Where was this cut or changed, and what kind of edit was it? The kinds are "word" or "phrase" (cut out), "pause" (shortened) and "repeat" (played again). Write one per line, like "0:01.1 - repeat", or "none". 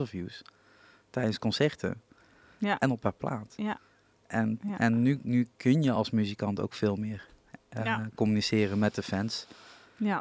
none